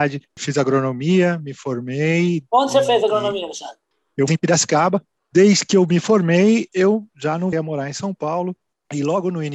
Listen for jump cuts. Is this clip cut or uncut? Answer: cut